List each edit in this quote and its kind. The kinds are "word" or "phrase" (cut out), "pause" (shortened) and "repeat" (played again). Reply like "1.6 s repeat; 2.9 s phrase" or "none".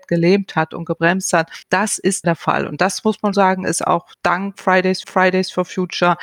1.6 s pause; 2.2 s phrase; 3.3 s word; 4.1 s pause; 5.0 s repeat